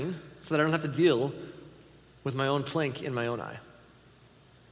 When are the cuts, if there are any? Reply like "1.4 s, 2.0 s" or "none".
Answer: none